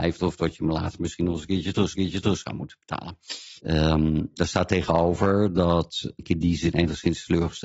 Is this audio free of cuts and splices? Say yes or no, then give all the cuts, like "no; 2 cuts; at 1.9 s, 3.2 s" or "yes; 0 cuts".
no; 2 cuts; at 1.9 s, 3.6 s